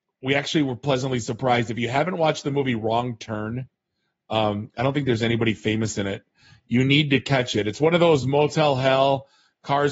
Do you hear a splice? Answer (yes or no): no